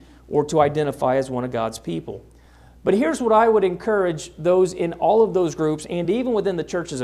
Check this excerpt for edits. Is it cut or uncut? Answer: uncut